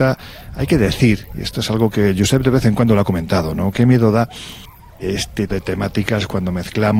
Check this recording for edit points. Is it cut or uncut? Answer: cut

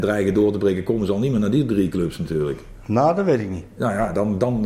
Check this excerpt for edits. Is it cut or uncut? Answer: uncut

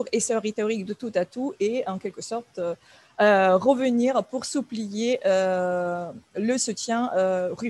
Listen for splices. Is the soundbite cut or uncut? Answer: uncut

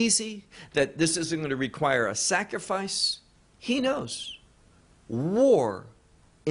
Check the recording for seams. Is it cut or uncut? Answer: uncut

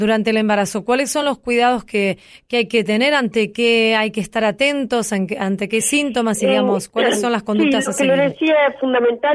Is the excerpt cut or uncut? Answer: uncut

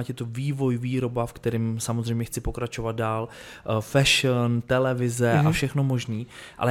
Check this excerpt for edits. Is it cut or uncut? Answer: uncut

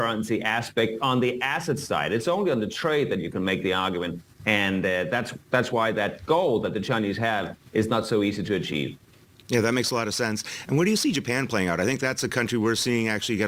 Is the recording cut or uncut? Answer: uncut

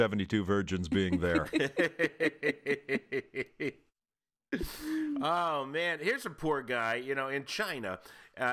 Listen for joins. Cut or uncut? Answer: uncut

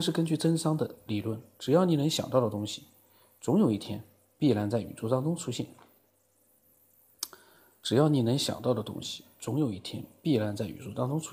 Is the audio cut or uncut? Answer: uncut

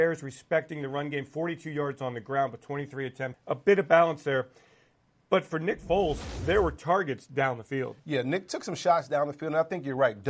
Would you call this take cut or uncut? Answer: cut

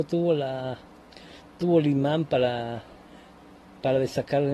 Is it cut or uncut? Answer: uncut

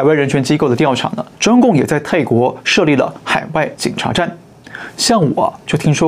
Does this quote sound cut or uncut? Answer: cut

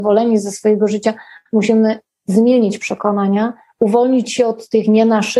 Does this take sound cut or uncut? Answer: uncut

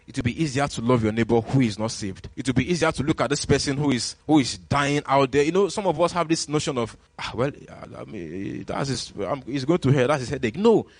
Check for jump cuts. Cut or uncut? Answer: cut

